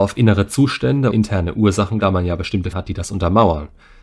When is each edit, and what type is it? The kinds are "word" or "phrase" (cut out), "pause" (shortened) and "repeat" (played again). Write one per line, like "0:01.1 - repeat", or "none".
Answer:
0:01.1 - word
0:02.0 - word
0:02.7 - word